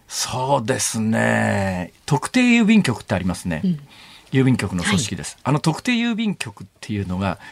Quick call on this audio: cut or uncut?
uncut